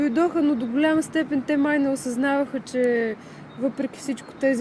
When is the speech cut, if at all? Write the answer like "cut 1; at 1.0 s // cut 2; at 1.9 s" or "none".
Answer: none